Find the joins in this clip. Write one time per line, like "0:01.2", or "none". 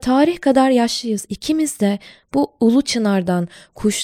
none